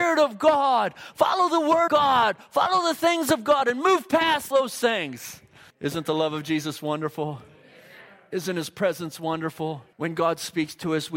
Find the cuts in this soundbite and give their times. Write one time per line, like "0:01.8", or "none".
0:01.9
0:04.5
0:05.7
0:09.9